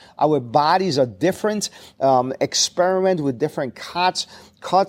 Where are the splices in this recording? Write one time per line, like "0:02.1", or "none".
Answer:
none